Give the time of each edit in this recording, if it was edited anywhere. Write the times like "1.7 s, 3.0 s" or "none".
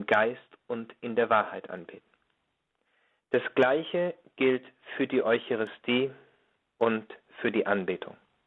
none